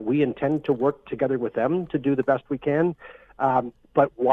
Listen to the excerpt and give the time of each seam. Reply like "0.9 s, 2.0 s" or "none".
none